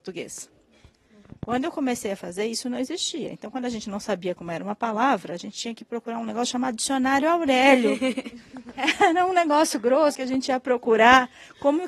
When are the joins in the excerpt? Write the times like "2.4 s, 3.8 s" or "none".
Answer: 1.4 s, 10.1 s

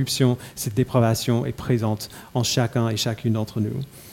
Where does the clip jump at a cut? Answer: none

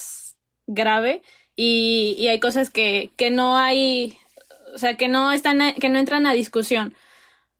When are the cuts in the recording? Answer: none

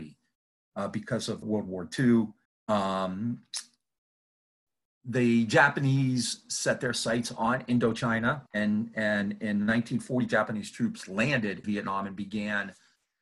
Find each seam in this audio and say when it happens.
1.4 s, 2.5 s, 8.5 s, 11.6 s

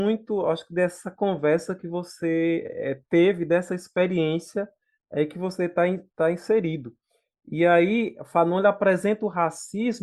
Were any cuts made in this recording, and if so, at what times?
none

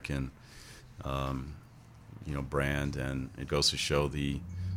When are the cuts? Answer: 3.5 s

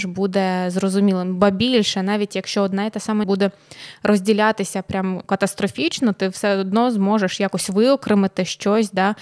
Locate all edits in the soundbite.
3.2 s, 5.2 s

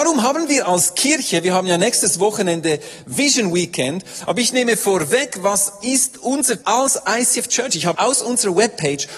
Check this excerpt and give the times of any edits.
6.6 s, 7.9 s

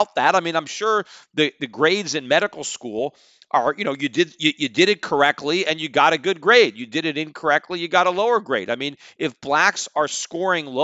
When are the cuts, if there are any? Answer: none

